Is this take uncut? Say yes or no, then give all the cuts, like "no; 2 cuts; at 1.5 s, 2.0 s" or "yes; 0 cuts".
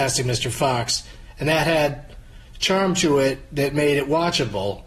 yes; 0 cuts